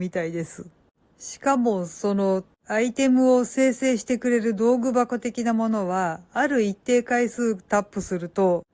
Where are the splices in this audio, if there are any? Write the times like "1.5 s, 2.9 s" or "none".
2.5 s